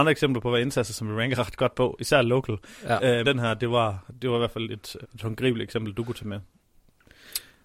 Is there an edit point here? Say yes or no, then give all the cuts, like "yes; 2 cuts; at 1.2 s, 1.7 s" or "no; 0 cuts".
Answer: yes; 2 cuts; at 3.2 s, 5.0 s